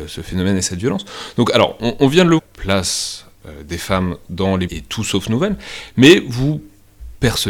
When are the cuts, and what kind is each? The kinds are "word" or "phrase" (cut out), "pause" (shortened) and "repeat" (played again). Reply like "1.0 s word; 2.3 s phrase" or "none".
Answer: 2.4 s phrase; 4.7 s phrase